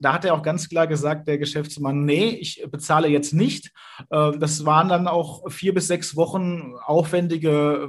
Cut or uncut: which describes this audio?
uncut